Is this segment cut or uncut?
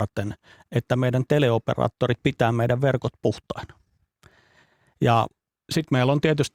uncut